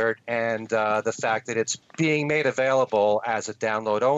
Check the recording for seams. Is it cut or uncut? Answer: uncut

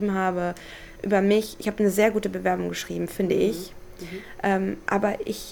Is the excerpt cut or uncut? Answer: uncut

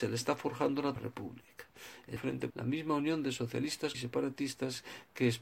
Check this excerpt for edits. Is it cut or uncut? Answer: cut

